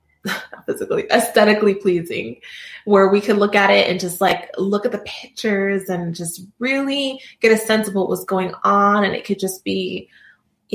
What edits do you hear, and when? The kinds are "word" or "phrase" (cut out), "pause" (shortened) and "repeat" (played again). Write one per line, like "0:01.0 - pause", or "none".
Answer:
none